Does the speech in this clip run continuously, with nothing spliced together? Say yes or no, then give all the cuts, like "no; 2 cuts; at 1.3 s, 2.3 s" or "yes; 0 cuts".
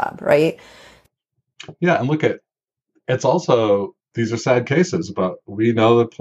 yes; 0 cuts